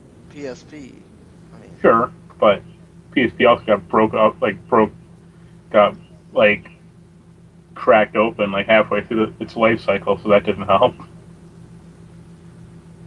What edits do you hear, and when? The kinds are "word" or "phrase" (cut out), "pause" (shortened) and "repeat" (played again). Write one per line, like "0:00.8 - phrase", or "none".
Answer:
none